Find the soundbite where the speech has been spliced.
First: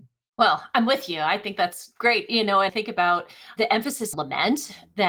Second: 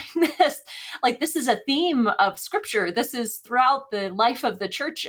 first; 2 cuts; at 2.7 s, 4.1 s

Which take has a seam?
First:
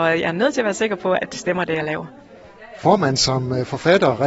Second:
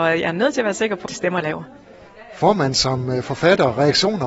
second; 2 cuts; at 1.1 s, 1.4 s

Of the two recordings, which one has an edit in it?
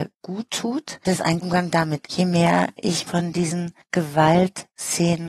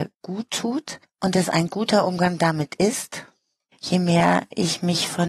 first; 4 cuts; at 1.0 s, 1.4 s, 2.0 s, 3.1 s

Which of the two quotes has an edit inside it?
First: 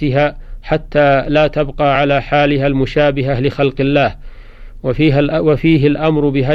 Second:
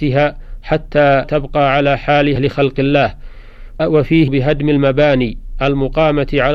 second; 4 cuts; at 1.2 s, 2.4 s, 3.8 s, 4.3 s

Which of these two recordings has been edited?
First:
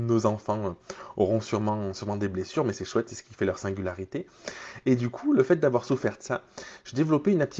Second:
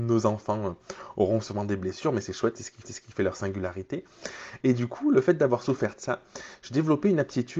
second; 2 cuts; at 1.4 s, 2.8 s

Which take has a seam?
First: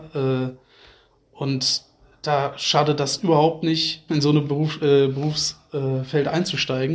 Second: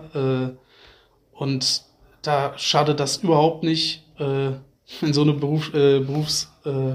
first; 1 cut; at 4.1 s

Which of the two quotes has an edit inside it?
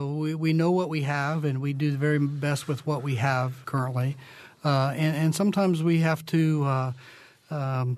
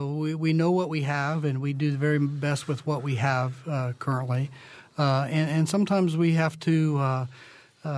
first; 1 cut; at 3.6 s

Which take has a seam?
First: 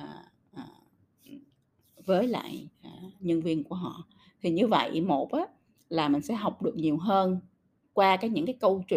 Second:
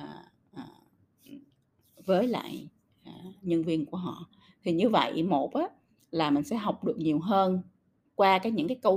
first; 1 cut; at 2.7 s

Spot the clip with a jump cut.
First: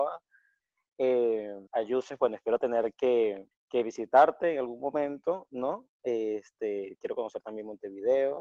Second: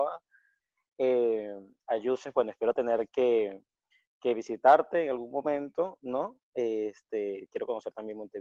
first; 2 cuts; at 1.7 s, 3.5 s

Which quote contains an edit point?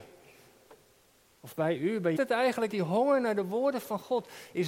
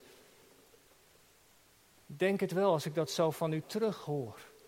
first; 2 cuts; at 2.2 s, 2.7 s

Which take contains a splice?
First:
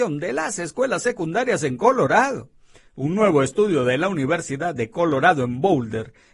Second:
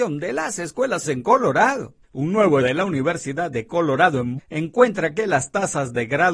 second; 4 cuts; at 1.0 s, 2.0 s, 2.6 s, 4.4 s

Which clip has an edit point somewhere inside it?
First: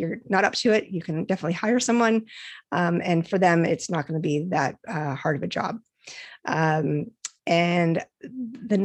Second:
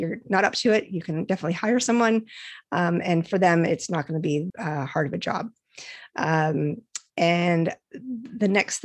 second; 1 cut; at 4.5 s

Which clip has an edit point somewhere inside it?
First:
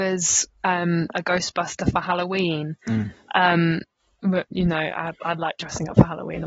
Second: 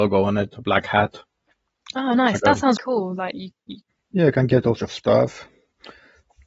second; 2 cuts; at 2.8 s, 4.8 s

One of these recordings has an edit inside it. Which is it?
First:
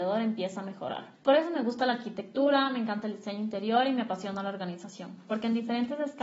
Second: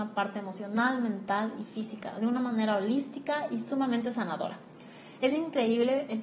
first; 1 cut; at 1.1 s

